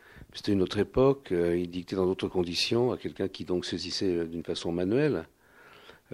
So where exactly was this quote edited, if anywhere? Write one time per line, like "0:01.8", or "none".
none